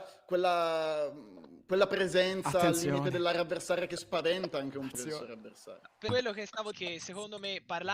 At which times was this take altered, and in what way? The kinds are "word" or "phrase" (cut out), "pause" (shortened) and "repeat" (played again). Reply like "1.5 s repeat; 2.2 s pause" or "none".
4.9 s word; 6.7 s phrase